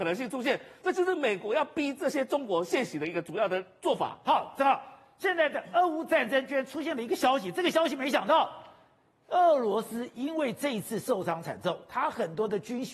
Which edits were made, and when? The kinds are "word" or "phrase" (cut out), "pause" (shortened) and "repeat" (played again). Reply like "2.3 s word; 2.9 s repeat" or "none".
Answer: none

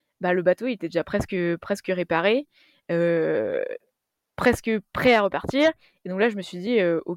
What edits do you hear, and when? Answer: none

